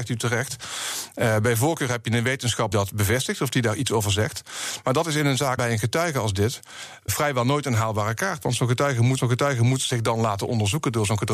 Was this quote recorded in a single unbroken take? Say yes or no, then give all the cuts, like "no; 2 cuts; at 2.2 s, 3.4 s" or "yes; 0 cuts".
no; 4 cuts; at 2.7 s, 5.6 s, 7.1 s, 9.2 s